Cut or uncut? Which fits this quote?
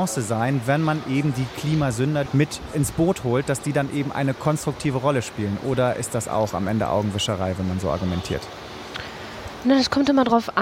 cut